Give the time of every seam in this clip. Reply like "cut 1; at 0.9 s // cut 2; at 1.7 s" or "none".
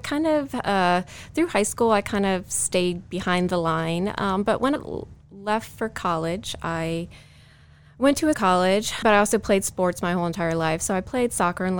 cut 1; at 4.8 s // cut 2; at 8.3 s // cut 3; at 9.0 s